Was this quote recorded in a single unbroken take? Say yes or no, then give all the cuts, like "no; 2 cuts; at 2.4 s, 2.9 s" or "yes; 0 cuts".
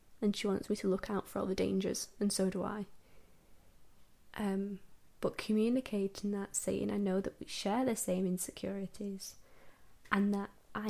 yes; 0 cuts